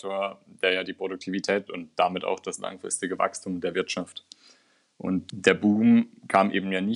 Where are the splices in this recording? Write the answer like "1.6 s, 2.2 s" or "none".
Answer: 1.7 s, 5.3 s